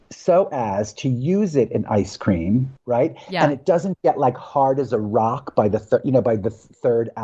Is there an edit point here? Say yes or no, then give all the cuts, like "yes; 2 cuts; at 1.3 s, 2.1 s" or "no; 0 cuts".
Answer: yes; 1 cut; at 2.8 s